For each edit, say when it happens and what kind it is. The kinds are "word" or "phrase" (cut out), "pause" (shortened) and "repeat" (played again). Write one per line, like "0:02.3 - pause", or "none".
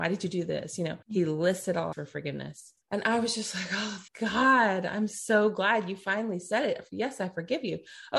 0:01.0 - pause
0:01.9 - phrase
0:02.8 - pause
0:04.1 - word